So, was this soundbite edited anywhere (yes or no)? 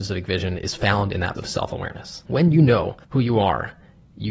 yes